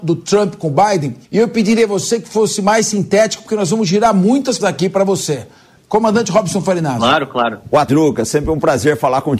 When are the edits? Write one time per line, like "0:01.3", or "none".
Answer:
0:01.2
0:04.6
0:07.9